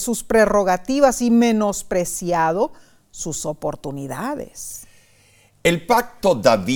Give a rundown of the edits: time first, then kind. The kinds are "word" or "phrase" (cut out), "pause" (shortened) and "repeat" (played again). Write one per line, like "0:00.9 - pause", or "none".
none